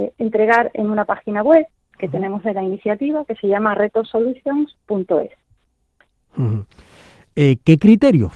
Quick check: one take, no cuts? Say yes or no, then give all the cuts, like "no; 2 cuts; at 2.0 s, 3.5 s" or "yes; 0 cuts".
yes; 0 cuts